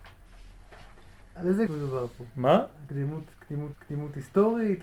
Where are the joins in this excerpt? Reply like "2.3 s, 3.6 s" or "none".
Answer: 1.7 s, 3.7 s